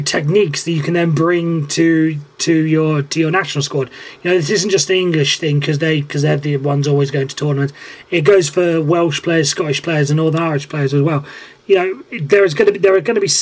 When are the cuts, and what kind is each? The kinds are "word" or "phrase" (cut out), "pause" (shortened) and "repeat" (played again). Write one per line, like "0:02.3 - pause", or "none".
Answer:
none

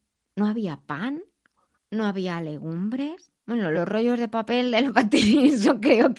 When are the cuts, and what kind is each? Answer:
0:01.7 - pause
0:03.4 - pause
0:03.7 - word

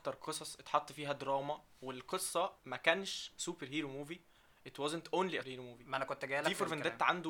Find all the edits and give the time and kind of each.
0:02.6 - word
0:04.5 - word
0:05.4 - word

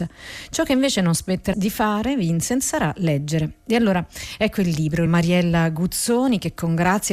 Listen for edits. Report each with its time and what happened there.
0:01.5 - phrase
0:05.1 - phrase

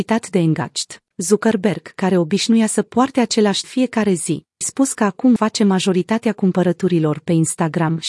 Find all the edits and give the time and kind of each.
0:01.1 - pause
0:03.6 - phrase
0:04.6 - word
0:05.4 - word

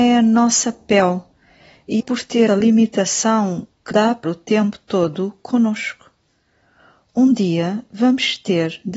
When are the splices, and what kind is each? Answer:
0:02.0 - word
0:02.5 - word
0:03.9 - word
0:04.2 - word

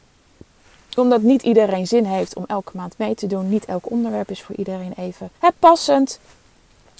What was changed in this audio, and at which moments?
0:05.4 - pause

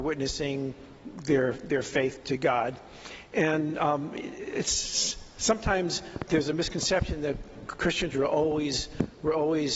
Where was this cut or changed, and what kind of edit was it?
0:02.2 - word
0:06.3 - word

